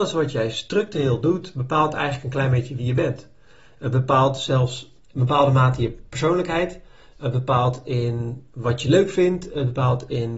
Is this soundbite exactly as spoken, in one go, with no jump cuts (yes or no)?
yes